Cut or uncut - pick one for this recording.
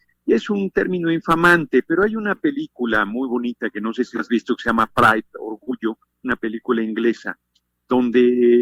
uncut